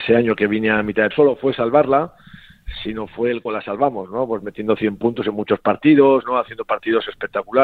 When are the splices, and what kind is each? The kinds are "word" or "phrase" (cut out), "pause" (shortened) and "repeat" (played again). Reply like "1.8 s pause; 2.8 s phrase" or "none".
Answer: 1.1 s phrase; 3.5 s word